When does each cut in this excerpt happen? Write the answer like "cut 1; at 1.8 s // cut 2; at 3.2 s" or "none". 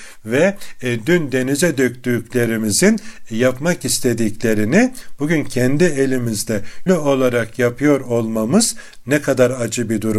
cut 1; at 6.9 s